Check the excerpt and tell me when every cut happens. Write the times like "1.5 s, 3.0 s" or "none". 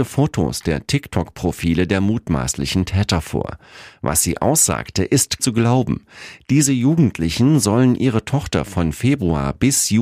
5.4 s